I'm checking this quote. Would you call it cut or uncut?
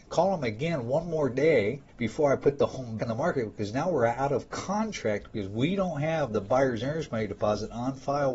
cut